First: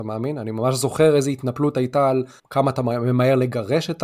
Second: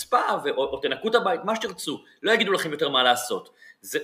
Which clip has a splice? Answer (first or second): first